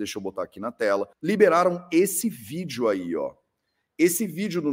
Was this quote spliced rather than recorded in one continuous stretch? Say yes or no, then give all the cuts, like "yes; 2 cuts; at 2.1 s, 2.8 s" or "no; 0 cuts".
yes; 1 cut; at 1.1 s